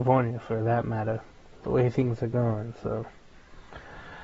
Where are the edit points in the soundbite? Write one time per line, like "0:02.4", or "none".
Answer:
none